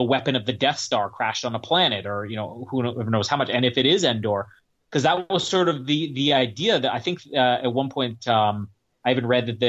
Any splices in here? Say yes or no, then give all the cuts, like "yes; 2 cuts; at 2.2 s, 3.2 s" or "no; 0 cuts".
no; 0 cuts